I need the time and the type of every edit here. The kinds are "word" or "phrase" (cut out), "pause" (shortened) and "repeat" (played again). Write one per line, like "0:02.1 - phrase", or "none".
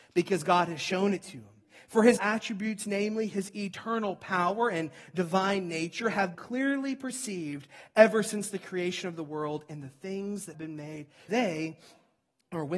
0:02.2 - word
0:06.3 - word
0:10.5 - word
0:11.3 - word